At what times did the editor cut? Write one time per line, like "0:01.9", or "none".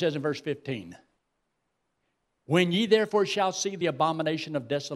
none